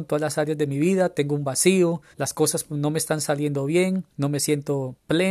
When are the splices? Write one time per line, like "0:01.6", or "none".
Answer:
0:02.1
0:04.1